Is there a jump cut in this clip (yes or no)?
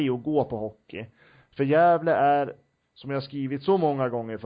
no